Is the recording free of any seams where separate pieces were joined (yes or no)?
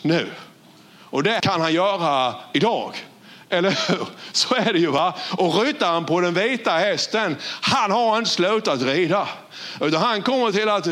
no